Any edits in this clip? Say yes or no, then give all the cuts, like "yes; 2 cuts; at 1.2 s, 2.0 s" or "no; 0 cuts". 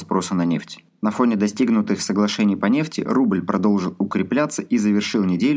no; 0 cuts